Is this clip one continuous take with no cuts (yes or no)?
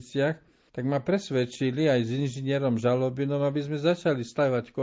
yes